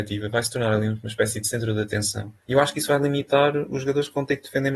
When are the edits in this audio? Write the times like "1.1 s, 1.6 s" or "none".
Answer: 2.4 s